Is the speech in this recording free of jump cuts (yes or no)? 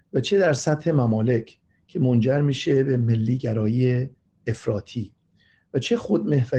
yes